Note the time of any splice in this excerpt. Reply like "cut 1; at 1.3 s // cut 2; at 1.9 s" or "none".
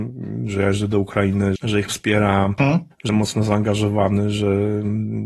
cut 1; at 1.6 s // cut 2; at 1.9 s // cut 3; at 2.6 s // cut 4; at 3.1 s